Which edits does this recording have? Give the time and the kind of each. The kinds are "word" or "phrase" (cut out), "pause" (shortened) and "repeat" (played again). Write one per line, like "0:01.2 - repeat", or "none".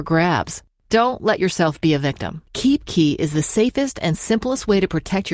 none